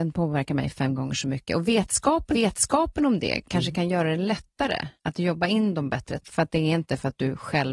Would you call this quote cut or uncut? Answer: cut